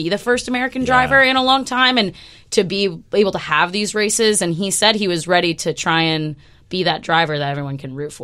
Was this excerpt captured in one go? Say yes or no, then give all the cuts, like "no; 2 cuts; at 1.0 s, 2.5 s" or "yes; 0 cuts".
yes; 0 cuts